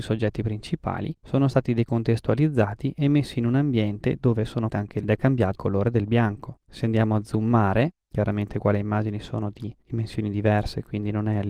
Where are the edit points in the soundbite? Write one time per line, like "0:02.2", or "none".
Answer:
0:04.7
0:05.0
0:05.6
0:08.0